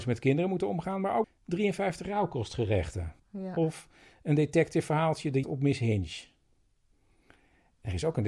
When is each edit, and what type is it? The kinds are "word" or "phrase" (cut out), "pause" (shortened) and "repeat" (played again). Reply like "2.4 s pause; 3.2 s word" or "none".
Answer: 1.2 s word; 3.2 s pause; 5.4 s word